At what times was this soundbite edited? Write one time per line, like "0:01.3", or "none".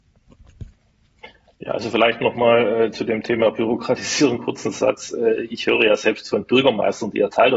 none